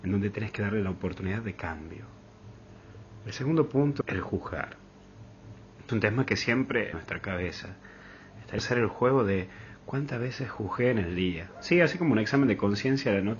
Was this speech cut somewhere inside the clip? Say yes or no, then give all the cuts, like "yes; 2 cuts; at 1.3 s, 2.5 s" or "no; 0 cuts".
yes; 4 cuts; at 4.0 s, 5.9 s, 6.9 s, 8.6 s